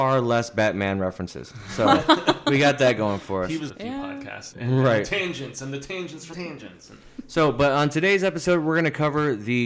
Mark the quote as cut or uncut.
cut